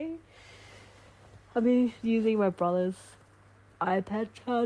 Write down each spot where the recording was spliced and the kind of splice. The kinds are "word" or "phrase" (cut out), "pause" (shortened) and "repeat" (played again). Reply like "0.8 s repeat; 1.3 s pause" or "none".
2.0 s word